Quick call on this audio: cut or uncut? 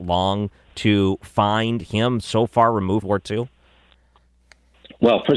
cut